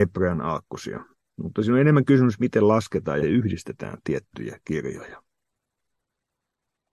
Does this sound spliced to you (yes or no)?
yes